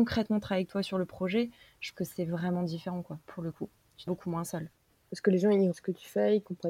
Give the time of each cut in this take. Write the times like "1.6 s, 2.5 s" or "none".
1.9 s, 4.1 s, 5.7 s